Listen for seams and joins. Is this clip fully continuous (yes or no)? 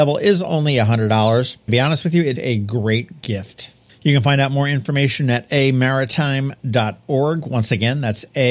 no